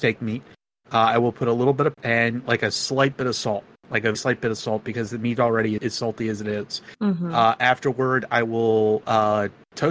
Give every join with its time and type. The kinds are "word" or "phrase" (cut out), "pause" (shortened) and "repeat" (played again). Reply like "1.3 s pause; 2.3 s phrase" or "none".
1.9 s word; 4.1 s word; 5.8 s word